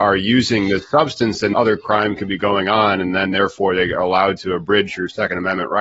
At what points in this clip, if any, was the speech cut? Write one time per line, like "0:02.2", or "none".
0:01.5